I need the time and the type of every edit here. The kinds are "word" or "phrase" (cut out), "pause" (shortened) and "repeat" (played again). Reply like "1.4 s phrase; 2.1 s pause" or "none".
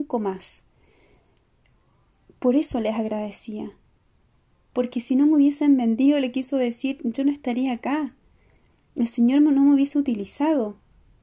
none